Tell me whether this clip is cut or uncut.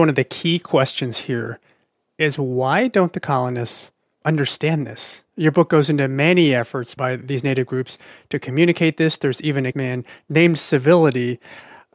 cut